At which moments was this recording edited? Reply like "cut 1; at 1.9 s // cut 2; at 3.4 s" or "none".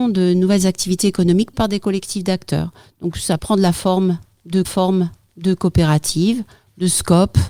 cut 1; at 1.5 s // cut 2; at 3.4 s // cut 3; at 4.6 s